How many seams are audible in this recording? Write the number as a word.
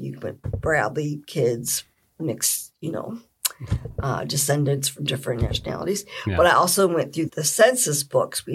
one